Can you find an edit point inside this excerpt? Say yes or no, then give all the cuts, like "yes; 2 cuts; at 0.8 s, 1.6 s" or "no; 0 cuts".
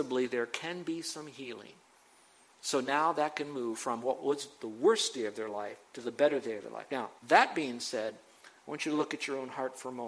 yes; 2 cuts; at 5.9 s, 7.2 s